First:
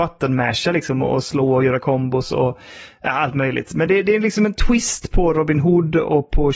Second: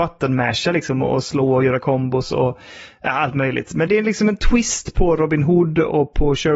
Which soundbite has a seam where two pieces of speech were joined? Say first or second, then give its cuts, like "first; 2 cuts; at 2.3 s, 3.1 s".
second; 1 cut; at 3.9 s